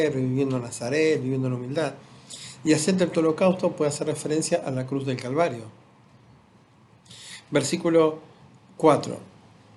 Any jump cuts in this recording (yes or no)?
no